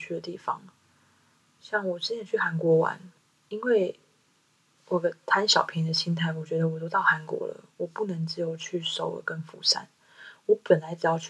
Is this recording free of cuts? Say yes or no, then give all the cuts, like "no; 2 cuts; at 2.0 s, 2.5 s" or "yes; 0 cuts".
no; 1 cut; at 3.2 s